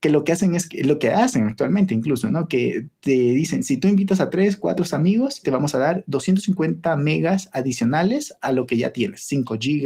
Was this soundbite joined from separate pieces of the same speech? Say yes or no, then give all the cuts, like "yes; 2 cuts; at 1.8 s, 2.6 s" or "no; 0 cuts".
yes; 1 cut; at 5.4 s